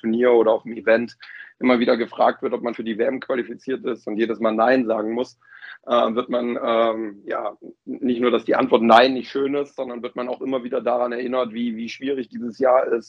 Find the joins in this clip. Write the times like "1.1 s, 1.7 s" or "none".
2.7 s, 7.9 s